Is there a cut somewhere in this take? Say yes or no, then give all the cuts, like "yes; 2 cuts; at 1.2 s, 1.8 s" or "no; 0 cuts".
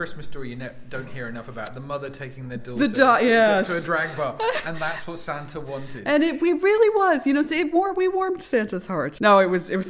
no; 0 cuts